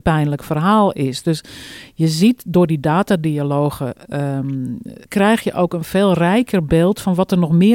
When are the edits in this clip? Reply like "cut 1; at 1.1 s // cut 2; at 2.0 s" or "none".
cut 1; at 5.0 s